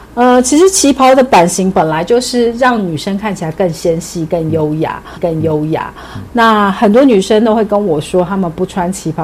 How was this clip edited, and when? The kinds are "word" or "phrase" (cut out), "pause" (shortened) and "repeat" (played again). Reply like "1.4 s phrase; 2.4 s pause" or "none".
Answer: 5.2 s repeat